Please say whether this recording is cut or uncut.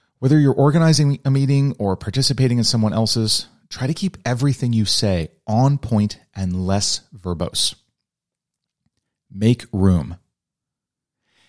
uncut